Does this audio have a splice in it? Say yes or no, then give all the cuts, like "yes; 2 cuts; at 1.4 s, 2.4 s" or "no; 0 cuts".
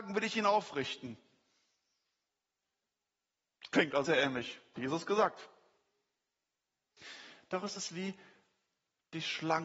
yes; 2 cuts; at 4.0 s, 4.8 s